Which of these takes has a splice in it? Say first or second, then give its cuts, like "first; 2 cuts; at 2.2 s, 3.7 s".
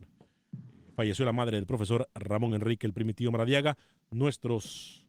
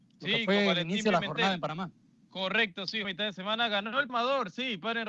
second; 2 cuts; at 3.0 s, 4.1 s